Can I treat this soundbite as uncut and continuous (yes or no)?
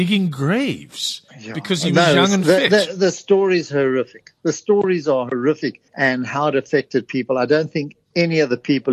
no